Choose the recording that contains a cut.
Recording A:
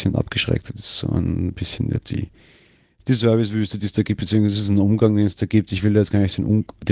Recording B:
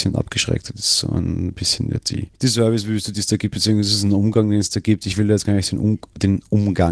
B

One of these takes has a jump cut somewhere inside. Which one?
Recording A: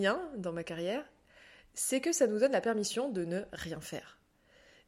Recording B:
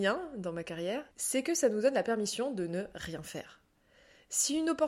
B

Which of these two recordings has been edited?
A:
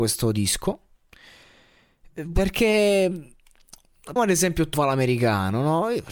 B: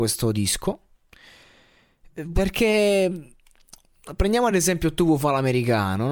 A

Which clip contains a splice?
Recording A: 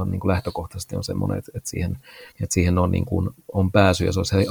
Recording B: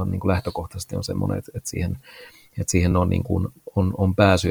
A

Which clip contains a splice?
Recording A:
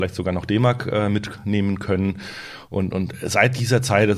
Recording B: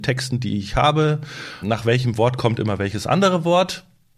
B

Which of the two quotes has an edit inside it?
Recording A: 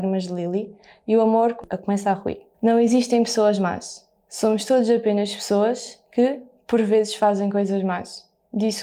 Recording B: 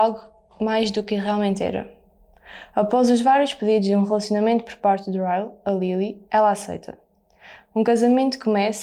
A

